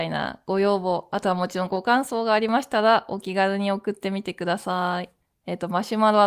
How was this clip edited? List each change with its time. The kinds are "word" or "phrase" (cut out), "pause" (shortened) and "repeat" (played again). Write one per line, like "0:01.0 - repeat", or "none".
0:05.2 - pause

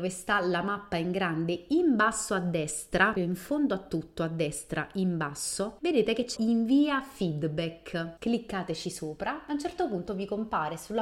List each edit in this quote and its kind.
0:03.2 - word
0:06.4 - phrase

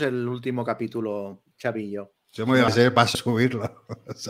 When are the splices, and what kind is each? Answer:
0:01.5 - pause
0:02.7 - word
0:03.1 - word

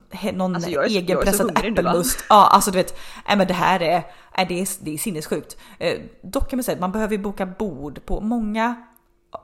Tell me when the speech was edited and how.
none

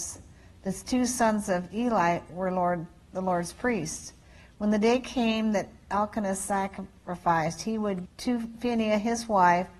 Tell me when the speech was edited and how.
0:08.0 - word

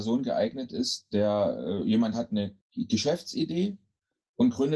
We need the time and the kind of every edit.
0:02.6 - pause

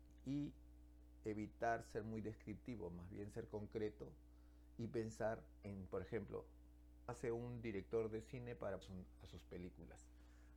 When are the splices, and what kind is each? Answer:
0:07.1 - word
0:08.8 - phrase

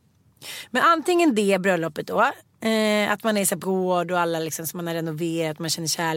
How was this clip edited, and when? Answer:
0:03.6 - word

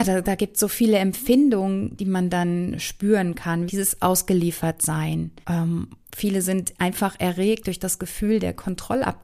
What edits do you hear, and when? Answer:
0:02.0 - phrase
0:03.7 - phrase
0:05.4 - pause

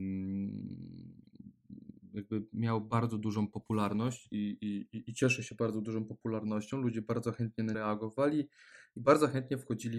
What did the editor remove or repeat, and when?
0:07.7 - word

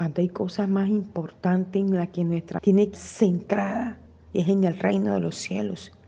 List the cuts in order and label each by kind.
0:02.6 - word
0:02.9 - word

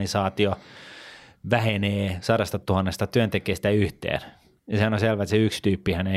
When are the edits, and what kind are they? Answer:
none

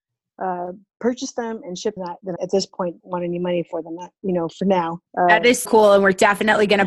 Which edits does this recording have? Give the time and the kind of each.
0:02.0 - phrase
0:02.4 - word
0:03.0 - word
0:05.1 - pause
0:05.7 - word

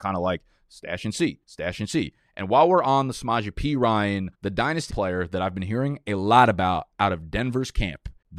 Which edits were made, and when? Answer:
0:01.4 - pause
0:04.3 - word
0:04.9 - word

